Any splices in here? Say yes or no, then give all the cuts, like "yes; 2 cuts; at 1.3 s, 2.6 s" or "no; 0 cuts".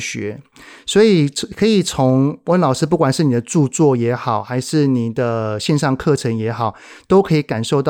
no; 0 cuts